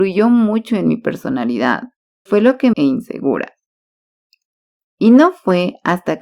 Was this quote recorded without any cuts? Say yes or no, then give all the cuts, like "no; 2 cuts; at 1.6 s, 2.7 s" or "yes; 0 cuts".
no; 2 cuts; at 2.3 s, 2.7 s